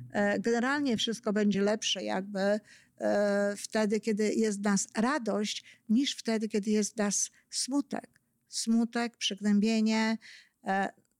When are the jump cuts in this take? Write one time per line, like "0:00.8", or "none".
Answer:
none